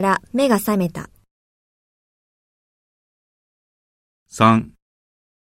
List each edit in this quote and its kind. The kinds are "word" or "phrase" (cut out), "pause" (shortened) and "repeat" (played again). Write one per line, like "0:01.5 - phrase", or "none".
none